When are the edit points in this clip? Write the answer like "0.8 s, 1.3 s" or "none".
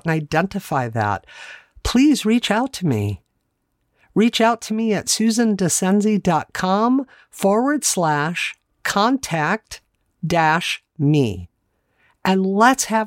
none

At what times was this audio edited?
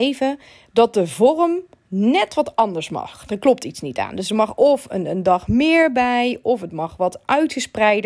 none

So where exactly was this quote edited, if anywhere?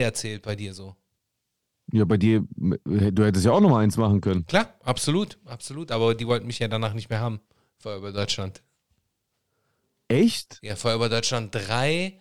none

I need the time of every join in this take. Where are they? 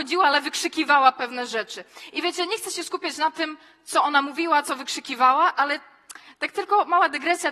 none

